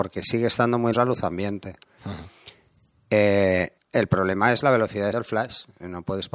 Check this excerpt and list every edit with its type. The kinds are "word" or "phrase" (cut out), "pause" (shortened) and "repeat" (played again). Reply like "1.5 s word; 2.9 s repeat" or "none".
0.9 s word; 3.8 s pause; 5.1 s word